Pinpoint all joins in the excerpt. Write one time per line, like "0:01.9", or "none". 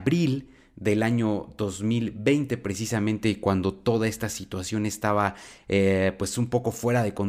none